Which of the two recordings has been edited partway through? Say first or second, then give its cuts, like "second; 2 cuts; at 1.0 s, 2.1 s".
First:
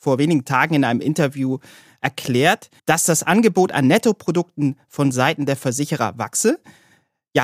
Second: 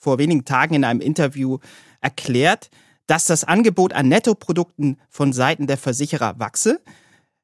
first; 1 cut; at 2.8 s